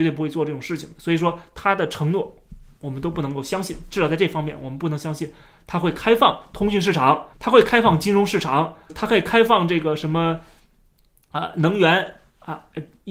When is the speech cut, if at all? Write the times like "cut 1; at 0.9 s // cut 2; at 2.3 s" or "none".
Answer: cut 1; at 7.3 s // cut 2; at 8.9 s

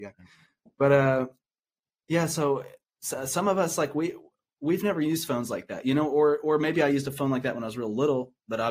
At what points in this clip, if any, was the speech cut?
none

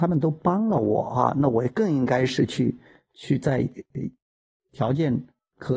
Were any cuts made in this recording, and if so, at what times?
none

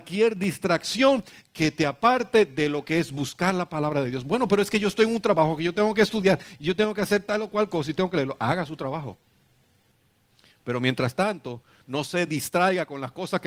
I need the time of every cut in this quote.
none

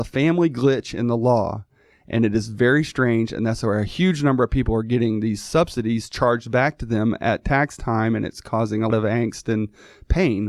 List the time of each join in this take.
cut 1; at 8.9 s

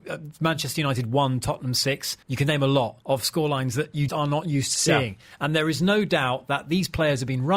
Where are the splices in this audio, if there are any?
cut 1; at 2.2 s // cut 2; at 3.0 s // cut 3; at 4.1 s

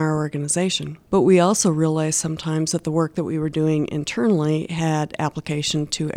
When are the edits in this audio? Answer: cut 1; at 1.0 s

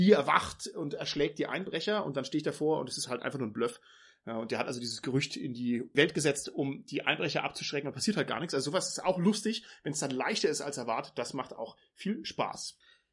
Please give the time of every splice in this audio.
none

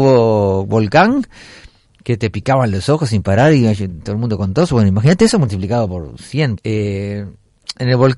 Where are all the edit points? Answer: cut 1; at 6.6 s

